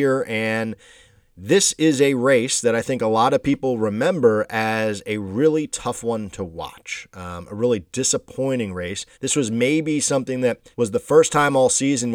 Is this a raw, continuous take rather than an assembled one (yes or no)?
no